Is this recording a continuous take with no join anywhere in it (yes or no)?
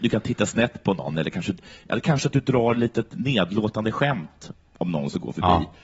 yes